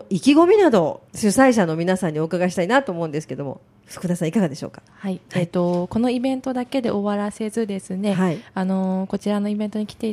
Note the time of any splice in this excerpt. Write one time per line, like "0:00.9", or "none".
0:01.1
0:04.9

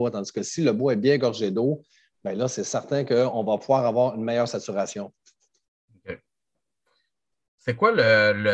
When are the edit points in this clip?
none

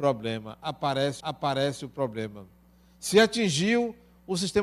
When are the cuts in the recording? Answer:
0:01.2

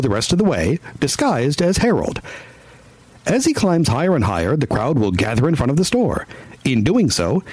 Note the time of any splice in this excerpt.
none

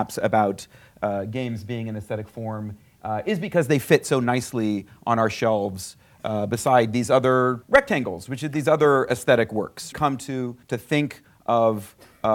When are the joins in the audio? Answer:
0:07.6
0:09.9
0:10.6

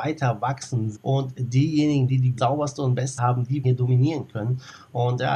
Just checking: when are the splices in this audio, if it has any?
0:01.0
0:02.4
0:03.2
0:03.6

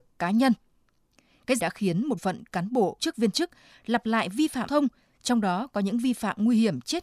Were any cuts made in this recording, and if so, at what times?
0:01.6
0:02.2
0:03.0
0:04.7

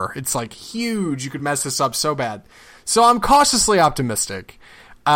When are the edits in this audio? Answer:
none

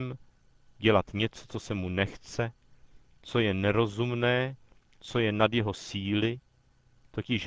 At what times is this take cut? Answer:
none

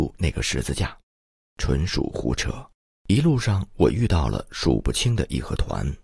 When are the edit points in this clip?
0:02.8

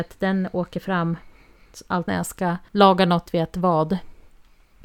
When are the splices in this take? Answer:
0:02.1
0:02.7
0:03.3

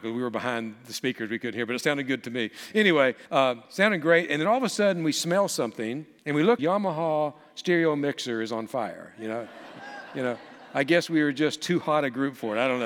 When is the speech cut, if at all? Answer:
0:03.3
0:06.2
0:06.6

